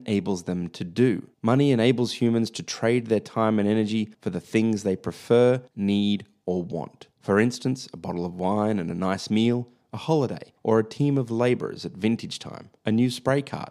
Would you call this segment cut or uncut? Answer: cut